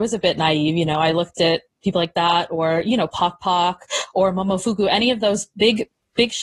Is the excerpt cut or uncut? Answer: uncut